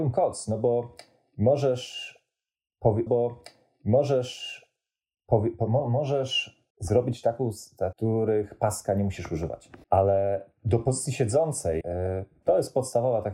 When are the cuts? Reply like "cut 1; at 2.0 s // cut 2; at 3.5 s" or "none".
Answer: cut 1; at 3.1 s // cut 2; at 6.7 s // cut 3; at 7.9 s // cut 4; at 9.8 s // cut 5; at 11.8 s // cut 6; at 12.4 s

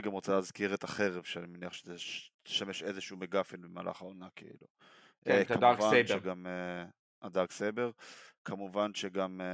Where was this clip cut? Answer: cut 1; at 2.3 s

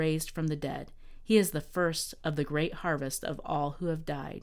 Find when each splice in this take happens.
none

